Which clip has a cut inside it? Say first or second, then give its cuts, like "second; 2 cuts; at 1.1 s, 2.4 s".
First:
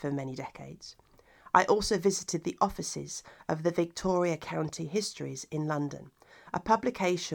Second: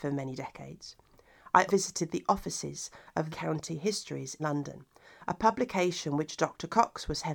second; 3 cuts; at 1.7 s, 3.3 s, 4.4 s